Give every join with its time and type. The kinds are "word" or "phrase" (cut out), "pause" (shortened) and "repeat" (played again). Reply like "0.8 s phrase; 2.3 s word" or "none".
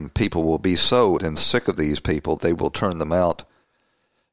1.2 s word; 2.4 s word